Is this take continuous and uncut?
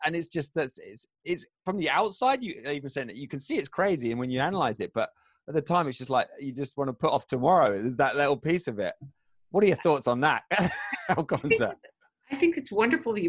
yes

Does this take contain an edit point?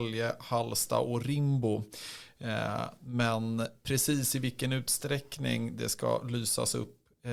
no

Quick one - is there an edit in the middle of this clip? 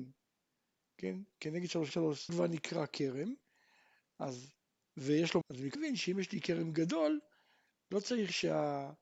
yes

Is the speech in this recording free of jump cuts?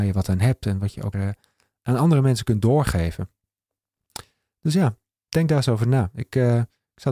no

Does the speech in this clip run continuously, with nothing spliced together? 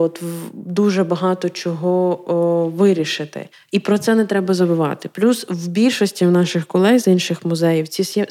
no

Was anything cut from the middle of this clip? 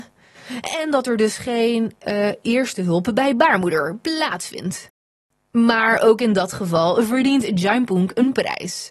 no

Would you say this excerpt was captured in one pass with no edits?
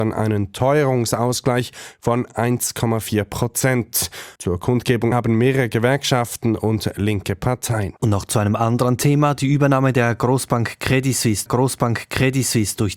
no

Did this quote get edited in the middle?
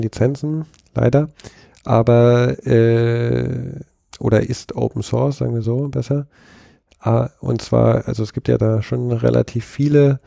no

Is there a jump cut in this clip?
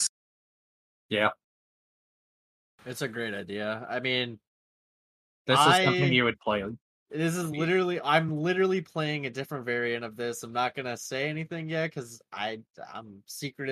no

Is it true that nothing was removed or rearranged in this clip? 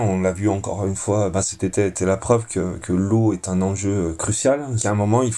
yes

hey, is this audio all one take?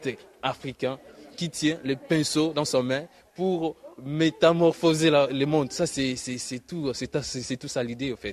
yes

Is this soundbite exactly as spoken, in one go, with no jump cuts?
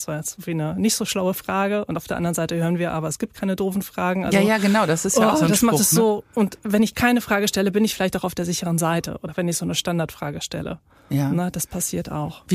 yes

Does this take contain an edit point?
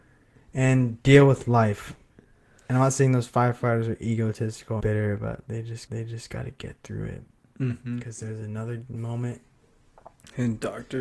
yes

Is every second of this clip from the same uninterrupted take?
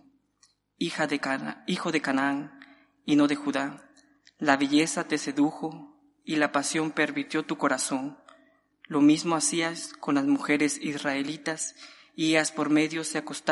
yes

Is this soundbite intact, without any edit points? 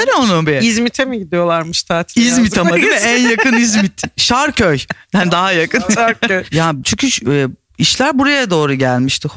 no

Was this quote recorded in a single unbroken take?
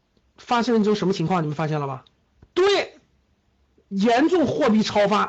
no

